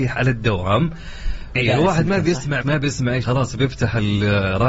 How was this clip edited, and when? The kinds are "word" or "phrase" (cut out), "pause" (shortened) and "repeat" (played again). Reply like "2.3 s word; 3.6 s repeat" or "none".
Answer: 1.5 s word; 2.6 s word; 3.2 s word

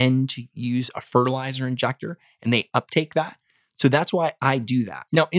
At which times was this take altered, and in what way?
none

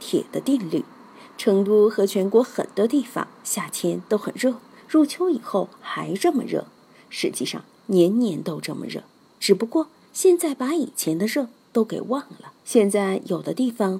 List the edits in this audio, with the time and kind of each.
12.6 s pause

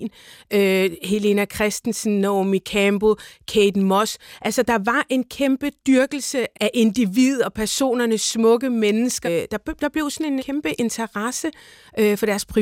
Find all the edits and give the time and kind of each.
6.5 s word; 9.2 s word; 10.4 s word

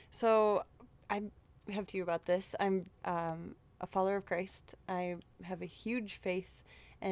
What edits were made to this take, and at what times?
1.9 s word; 3.0 s word

